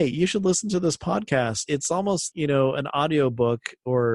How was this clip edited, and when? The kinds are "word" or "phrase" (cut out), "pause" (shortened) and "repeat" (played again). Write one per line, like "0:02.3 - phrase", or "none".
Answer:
0:01.7 - word
0:02.3 - word